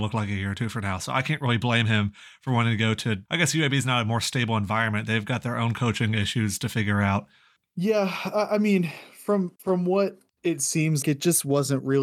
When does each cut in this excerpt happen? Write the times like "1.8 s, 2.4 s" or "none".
3.3 s, 9.6 s, 11.0 s